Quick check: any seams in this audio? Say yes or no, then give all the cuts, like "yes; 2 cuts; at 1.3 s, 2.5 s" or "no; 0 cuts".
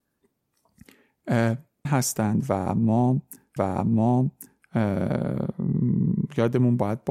yes; 2 cuts; at 1.8 s, 3.6 s